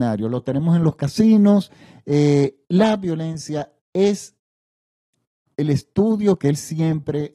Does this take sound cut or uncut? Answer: uncut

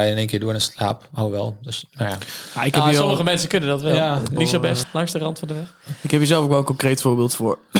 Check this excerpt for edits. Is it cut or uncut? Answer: cut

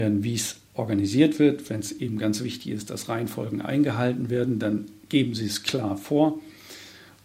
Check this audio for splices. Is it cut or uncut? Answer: uncut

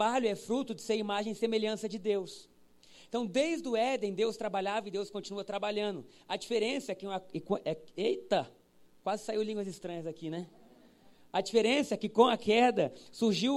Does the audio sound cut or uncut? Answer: uncut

